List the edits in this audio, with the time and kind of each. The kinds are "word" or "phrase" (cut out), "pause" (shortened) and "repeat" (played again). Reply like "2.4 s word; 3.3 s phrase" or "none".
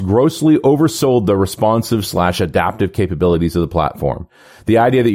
none